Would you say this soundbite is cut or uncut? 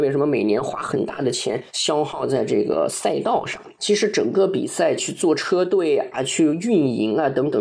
cut